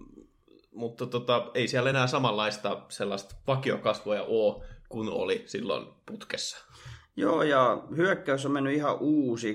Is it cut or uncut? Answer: uncut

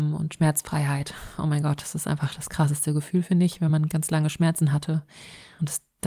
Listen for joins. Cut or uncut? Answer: uncut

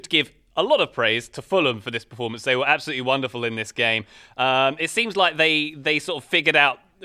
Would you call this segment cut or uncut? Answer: uncut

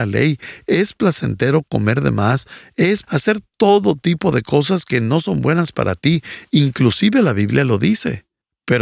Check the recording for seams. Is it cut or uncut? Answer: cut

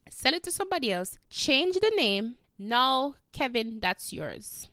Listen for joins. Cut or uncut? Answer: cut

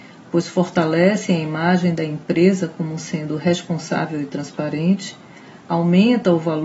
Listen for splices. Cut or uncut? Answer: uncut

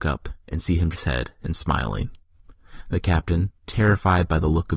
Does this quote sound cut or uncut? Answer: cut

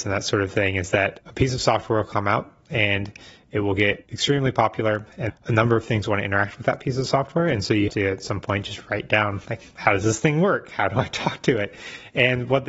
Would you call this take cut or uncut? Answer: cut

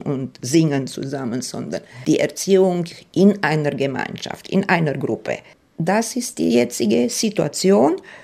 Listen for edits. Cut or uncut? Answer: uncut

